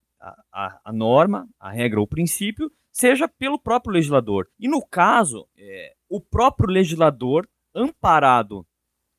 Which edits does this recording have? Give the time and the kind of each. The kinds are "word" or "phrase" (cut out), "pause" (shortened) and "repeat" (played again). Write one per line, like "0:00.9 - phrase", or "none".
0:04.5 - pause
0:05.5 - pause